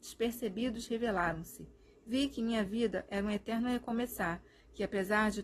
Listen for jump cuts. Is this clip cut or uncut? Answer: uncut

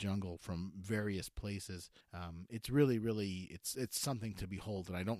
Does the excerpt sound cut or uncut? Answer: cut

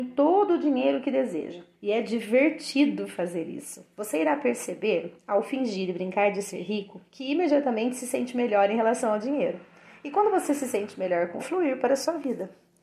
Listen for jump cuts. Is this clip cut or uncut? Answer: cut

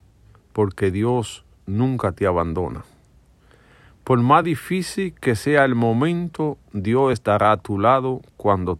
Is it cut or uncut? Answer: uncut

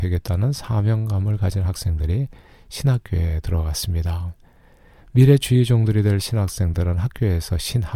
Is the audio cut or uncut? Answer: uncut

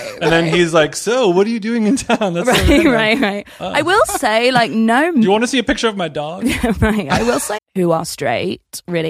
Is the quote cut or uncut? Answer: cut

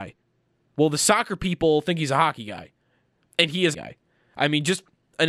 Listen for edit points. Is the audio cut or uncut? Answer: cut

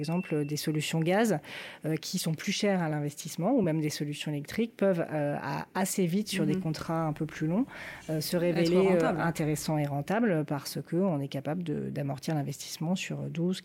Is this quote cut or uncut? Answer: uncut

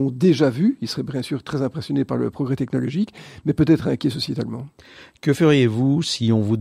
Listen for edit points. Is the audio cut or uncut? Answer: uncut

